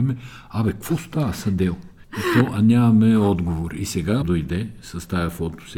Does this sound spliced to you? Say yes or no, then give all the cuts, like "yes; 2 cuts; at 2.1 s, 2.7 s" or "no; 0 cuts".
yes; 1 cut; at 4.2 s